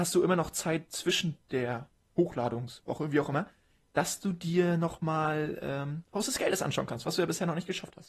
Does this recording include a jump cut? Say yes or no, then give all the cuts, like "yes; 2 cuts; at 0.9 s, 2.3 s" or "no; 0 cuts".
no; 0 cuts